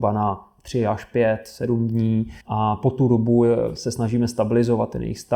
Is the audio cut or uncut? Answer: cut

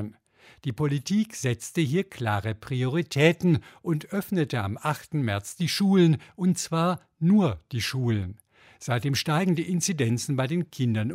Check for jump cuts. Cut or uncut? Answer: uncut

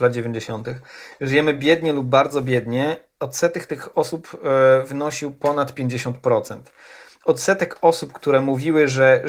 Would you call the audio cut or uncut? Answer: uncut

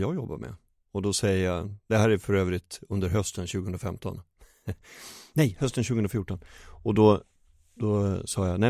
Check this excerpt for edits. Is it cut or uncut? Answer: uncut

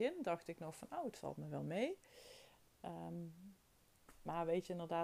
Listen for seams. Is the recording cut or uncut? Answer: uncut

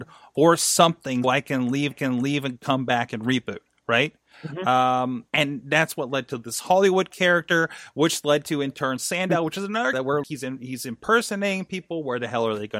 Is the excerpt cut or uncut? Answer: cut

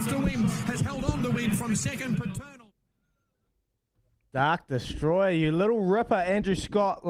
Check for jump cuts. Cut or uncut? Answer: uncut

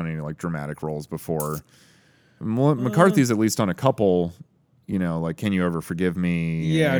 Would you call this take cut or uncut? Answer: uncut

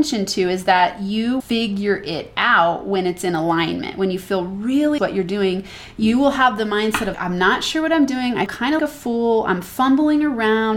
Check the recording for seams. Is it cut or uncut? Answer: cut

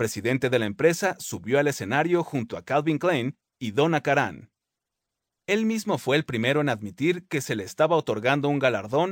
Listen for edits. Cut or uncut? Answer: uncut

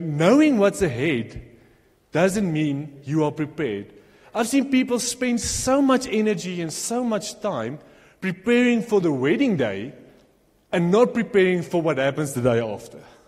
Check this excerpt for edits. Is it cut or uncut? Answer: uncut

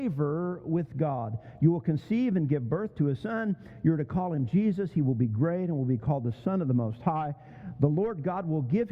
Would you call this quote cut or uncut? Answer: uncut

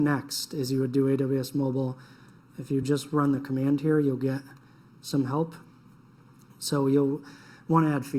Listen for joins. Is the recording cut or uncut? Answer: uncut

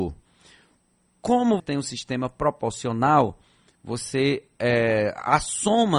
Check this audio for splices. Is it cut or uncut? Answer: cut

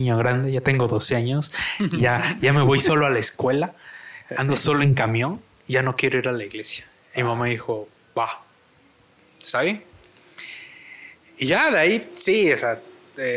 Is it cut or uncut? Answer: uncut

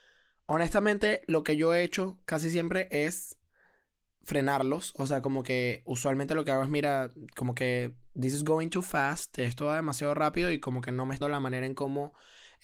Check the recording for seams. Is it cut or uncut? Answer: cut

